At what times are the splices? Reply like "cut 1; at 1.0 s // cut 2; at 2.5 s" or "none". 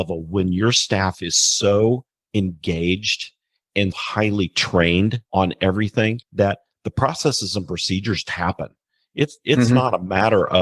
cut 1; at 2.1 s // cut 2; at 3.9 s // cut 3; at 5.3 s // cut 4; at 6.2 s // cut 5; at 8.2 s